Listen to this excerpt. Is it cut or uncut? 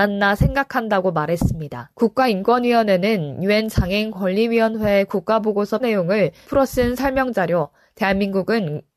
cut